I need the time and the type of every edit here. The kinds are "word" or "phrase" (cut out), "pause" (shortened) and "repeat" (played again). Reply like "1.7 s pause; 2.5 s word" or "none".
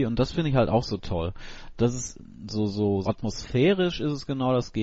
3.0 s word